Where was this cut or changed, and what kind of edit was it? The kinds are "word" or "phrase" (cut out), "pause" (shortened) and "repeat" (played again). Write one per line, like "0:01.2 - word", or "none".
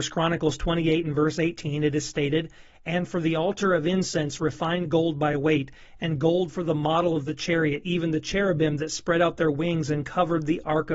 none